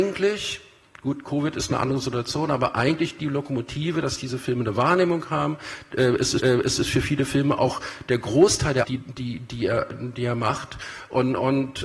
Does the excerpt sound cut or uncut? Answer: cut